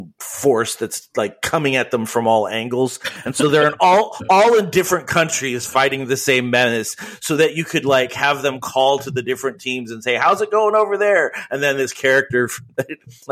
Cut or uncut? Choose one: uncut